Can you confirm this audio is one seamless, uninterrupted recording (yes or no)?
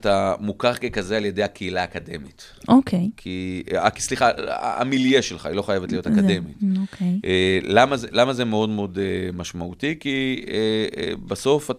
yes